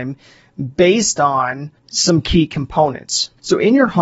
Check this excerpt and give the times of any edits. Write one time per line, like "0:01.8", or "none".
0:01.8